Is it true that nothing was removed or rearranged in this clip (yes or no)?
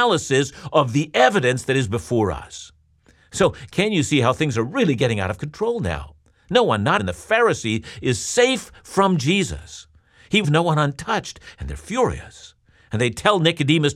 no